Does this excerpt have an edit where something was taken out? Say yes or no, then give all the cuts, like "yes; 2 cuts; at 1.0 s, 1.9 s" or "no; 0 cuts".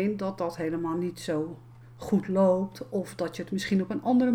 no; 0 cuts